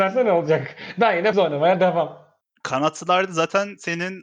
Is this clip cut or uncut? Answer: cut